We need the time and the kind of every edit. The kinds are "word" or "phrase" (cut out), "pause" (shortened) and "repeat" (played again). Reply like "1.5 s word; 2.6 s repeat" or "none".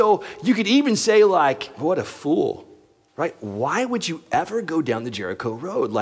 none